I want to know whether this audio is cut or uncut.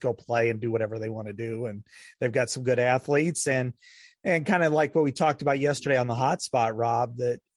uncut